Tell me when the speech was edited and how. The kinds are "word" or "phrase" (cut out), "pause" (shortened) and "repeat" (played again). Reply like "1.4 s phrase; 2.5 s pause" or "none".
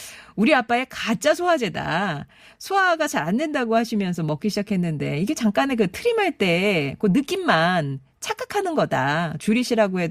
none